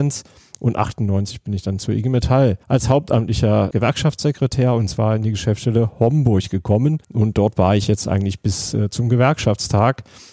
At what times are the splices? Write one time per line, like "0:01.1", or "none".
0:02.6
0:03.7
0:07.0